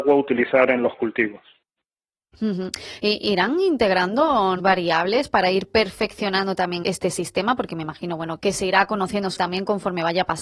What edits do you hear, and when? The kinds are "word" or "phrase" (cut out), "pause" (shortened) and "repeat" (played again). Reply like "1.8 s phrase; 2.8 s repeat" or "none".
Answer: 4.6 s word; 6.8 s word; 8.4 s word; 9.4 s word